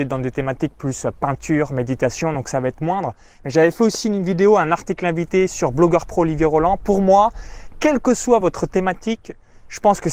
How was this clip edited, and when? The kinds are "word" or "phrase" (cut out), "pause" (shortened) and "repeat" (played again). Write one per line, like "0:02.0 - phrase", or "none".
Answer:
none